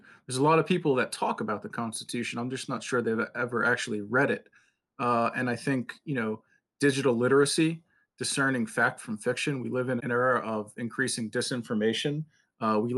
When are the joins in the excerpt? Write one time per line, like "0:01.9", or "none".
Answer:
0:10.0